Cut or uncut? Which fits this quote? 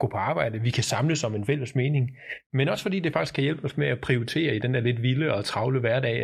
uncut